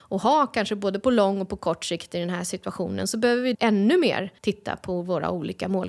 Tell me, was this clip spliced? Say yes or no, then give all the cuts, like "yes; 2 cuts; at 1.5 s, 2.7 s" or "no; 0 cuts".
yes; 2 cuts; at 3.5 s, 4.4 s